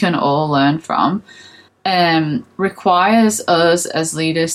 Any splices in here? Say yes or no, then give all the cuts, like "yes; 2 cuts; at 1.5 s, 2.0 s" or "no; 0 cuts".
yes; 1 cut; at 1.7 s